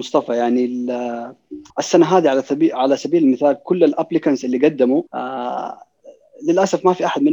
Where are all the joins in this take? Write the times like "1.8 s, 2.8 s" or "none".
1.7 s, 5.1 s